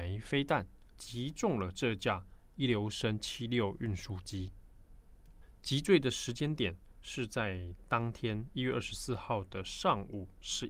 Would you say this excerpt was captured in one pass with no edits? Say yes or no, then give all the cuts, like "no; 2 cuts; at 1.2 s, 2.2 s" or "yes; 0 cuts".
no; 1 cut; at 0.9 s